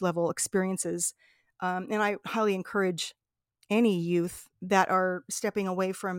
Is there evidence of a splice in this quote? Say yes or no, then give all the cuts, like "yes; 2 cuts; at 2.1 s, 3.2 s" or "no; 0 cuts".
no; 0 cuts